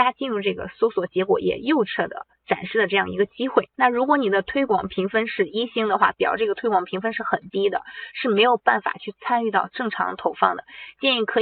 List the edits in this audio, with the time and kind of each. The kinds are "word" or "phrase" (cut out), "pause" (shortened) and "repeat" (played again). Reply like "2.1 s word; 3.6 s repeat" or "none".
2.3 s pause; 3.7 s pause

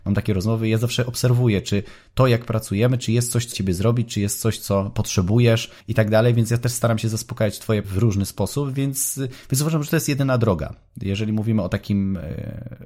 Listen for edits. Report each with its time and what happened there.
3.5 s phrase; 5.8 s pause; 7.8 s word

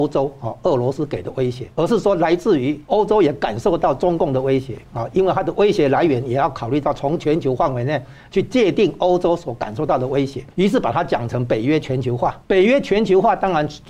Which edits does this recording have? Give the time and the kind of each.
1.7 s pause; 2.8 s pause; 10.5 s pause; 12.4 s pause

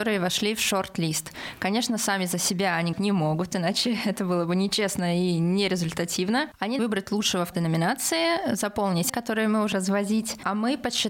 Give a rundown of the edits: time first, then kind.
2.9 s word; 6.8 s word; 7.5 s word; 9.1 s word; 9.7 s word

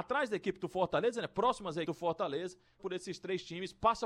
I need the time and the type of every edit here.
1.8 s word; 2.8 s word

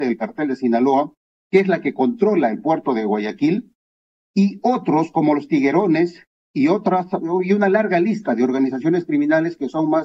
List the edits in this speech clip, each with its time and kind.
none

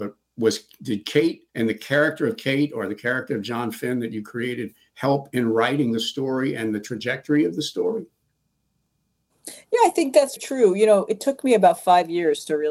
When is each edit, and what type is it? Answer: 1.5 s pause; 10.4 s word

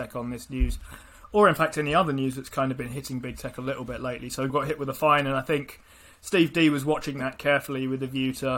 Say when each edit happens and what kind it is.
4.5 s word

